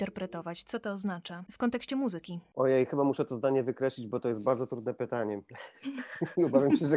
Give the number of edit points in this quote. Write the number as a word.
zero